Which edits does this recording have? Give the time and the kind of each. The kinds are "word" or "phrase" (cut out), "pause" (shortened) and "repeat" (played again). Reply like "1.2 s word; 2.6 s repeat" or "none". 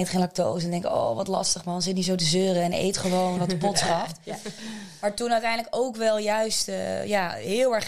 3.4 s word